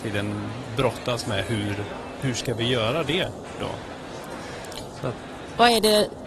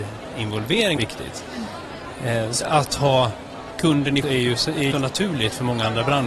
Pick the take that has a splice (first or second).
second